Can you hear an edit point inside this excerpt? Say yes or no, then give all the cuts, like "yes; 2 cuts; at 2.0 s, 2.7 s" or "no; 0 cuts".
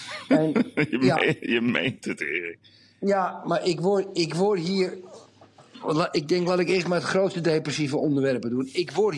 no; 0 cuts